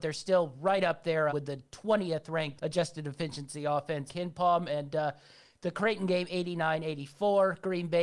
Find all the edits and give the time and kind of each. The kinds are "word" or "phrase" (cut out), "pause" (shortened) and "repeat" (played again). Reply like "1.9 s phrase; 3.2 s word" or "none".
1.3 s word; 2.6 s word; 4.1 s phrase